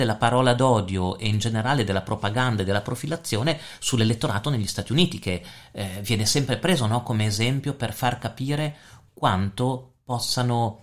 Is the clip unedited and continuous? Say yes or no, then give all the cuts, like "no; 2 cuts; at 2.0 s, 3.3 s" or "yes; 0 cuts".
yes; 0 cuts